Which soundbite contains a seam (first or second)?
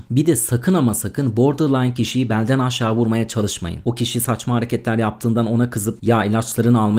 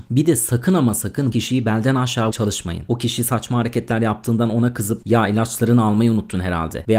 second